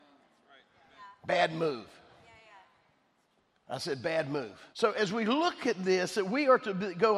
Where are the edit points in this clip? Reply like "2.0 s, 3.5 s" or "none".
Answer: 4.7 s